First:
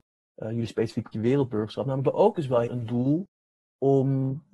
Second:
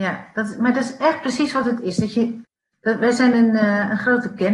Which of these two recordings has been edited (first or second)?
first